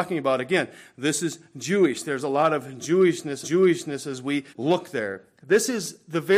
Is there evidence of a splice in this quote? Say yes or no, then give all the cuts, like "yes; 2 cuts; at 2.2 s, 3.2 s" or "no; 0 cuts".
yes; 2 cuts; at 3.4 s, 4.5 s